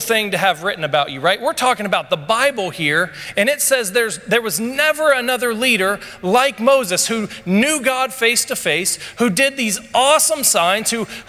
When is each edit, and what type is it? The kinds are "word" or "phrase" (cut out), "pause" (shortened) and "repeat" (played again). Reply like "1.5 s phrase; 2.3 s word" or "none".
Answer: none